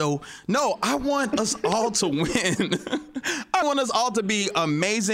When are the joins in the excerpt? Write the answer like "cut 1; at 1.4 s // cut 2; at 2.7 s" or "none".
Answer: cut 1; at 3.6 s